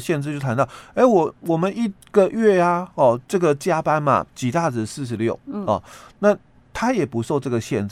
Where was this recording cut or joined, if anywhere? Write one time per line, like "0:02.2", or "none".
0:03.2
0:04.3